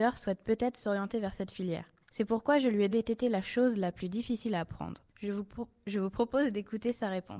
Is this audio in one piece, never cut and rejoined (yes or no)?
no